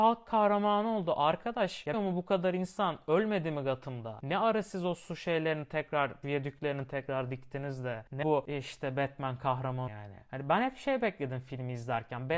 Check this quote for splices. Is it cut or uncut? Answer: cut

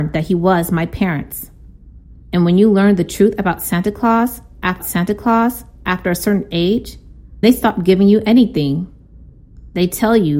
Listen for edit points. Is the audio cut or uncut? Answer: cut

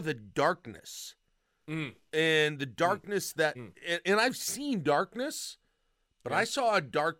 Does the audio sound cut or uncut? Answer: uncut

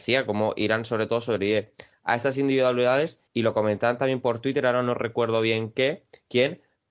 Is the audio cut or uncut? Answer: cut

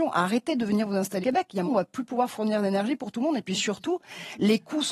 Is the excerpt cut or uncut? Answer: cut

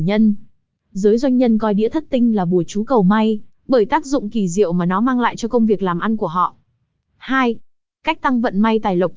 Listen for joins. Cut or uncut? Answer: uncut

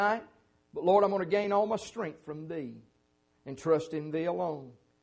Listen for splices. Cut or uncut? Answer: uncut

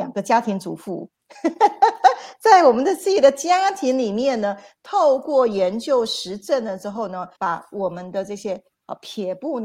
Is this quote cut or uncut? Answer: cut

